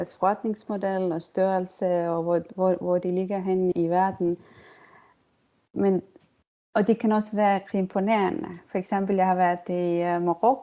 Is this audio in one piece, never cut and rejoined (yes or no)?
no